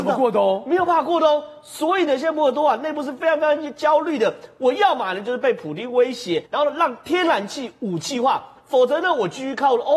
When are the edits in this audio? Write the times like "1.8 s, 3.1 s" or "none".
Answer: 6.5 s